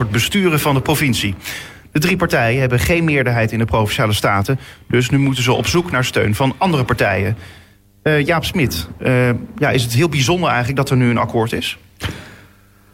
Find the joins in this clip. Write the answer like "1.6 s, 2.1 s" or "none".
none